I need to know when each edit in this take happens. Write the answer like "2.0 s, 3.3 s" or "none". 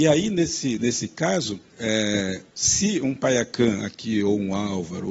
1.7 s